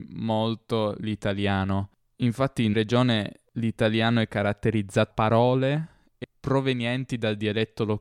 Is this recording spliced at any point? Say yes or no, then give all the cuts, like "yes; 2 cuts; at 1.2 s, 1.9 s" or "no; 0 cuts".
yes; 3 cuts; at 2.7 s, 5.1 s, 6.2 s